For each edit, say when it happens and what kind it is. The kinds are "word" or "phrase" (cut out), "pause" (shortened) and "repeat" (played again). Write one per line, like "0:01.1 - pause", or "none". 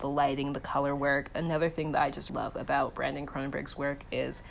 0:02.3 - word